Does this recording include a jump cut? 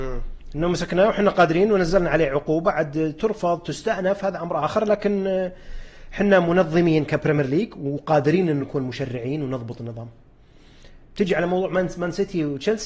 no; 0 cuts

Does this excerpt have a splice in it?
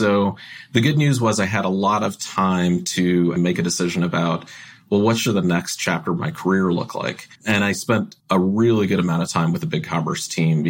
yes; 3 cuts; at 3.4 s, 7.4 s, 8.2 s

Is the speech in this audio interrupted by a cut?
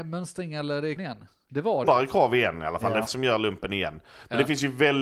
yes; 3 cuts; at 1.0 s, 1.8 s, 3.1 s

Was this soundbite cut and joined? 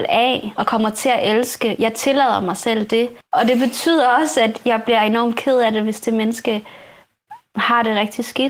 yes; 1 cut; at 3.2 s

